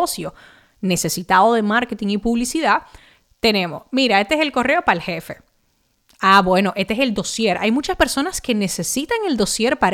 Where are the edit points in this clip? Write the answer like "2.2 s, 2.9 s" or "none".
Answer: none